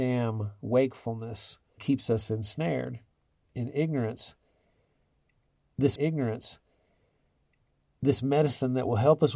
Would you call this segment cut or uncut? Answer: cut